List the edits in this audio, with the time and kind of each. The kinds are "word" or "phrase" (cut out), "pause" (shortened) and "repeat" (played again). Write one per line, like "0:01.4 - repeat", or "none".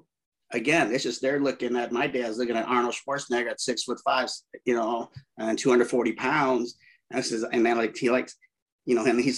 none